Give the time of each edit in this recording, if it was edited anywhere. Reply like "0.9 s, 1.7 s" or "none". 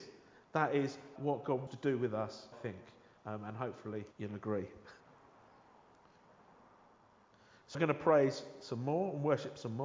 1.2 s, 1.7 s, 2.5 s, 4.1 s, 5.0 s, 7.7 s